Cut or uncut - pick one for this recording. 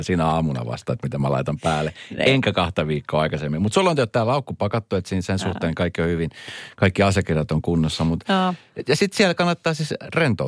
uncut